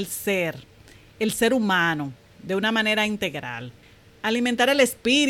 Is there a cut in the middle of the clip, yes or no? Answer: yes